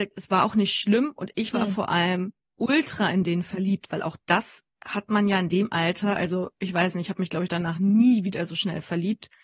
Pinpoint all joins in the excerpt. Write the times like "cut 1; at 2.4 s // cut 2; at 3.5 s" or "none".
none